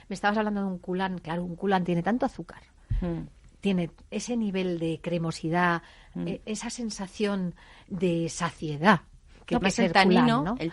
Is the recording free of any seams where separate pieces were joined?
no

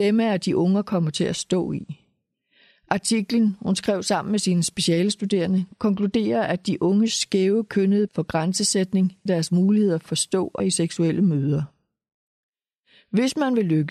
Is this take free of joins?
no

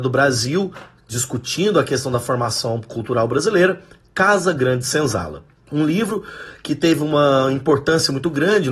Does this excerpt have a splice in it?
no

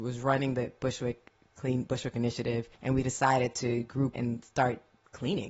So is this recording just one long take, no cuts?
no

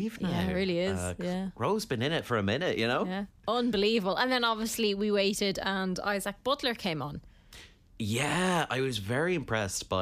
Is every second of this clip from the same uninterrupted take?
yes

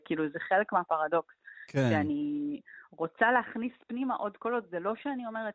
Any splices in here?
no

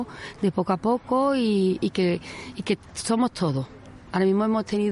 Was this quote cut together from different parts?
no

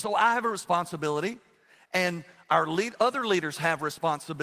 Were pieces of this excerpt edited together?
no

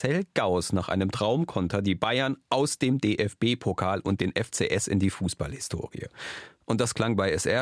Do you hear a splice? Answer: no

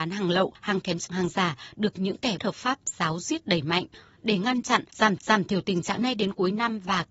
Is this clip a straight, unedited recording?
no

